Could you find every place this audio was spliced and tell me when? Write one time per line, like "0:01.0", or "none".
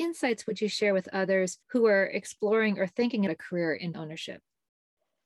0:01.6
0:03.3
0:03.9